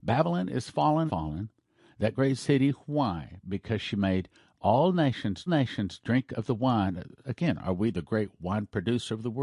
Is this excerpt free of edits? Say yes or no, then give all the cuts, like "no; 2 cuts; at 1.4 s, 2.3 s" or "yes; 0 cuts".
no; 2 cuts; at 1.1 s, 5.5 s